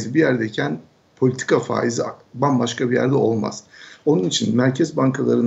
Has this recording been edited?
no; 0 cuts

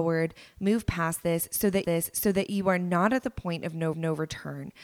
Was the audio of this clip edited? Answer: yes; 2 cuts; at 1.8 s, 3.9 s

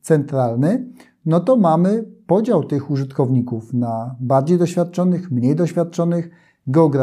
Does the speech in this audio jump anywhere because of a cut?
no; 0 cuts

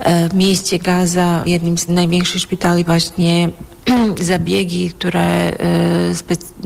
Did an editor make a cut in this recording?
yes; 3 cuts; at 1.4 s, 1.9 s, 2.9 s

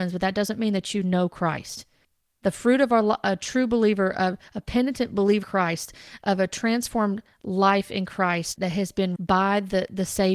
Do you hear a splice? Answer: yes; 3 cuts; at 5.4 s, 8.6 s, 9.2 s

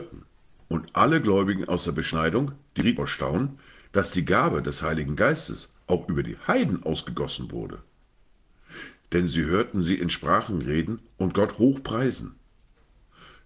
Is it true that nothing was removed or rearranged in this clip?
yes; 0 cuts

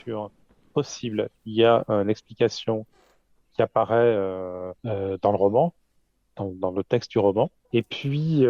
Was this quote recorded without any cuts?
no; 1 cut; at 4.8 s

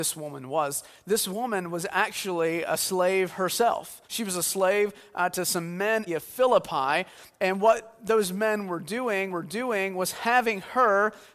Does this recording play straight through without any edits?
no; 3 cuts; at 4.0 s, 6.1 s, 9.3 s

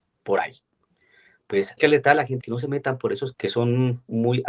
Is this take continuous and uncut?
no; 3 cuts; at 1.8 s, 2.4 s, 3.3 s

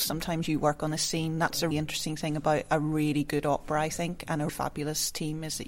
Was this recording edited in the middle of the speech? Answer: yes; 2 cuts; at 1.7 s, 4.5 s

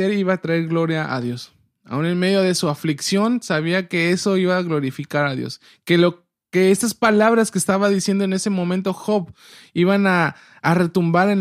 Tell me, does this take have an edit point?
no; 0 cuts

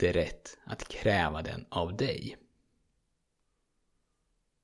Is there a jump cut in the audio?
no; 0 cuts

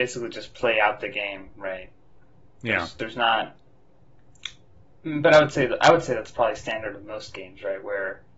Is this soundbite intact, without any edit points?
yes; 0 cuts

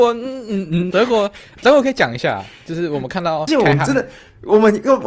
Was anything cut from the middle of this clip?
yes; 2 cuts; at 0.9 s, 3.5 s

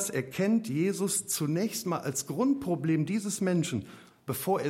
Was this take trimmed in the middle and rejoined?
no; 0 cuts

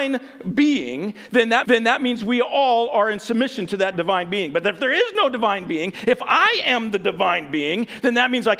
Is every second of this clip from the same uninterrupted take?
no; 2 cuts; at 1.6 s, 3.9 s

